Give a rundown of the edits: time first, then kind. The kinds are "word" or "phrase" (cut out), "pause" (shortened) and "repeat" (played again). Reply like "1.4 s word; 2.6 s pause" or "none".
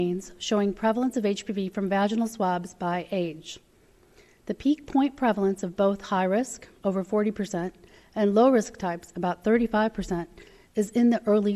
none